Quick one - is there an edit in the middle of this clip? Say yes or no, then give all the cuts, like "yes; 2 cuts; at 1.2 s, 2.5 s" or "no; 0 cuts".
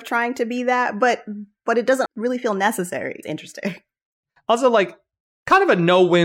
yes; 2 cuts; at 2.1 s, 3.2 s